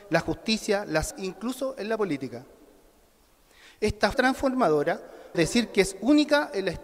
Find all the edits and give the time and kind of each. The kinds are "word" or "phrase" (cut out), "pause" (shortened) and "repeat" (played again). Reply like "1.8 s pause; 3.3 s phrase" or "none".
1.1 s word; 4.1 s word; 5.3 s word